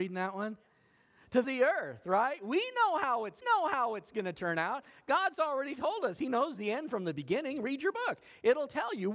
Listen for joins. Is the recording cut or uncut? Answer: cut